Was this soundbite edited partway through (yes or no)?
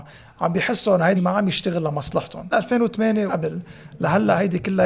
yes